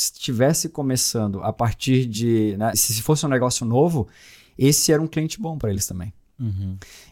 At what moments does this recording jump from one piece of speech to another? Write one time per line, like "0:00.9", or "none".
0:02.7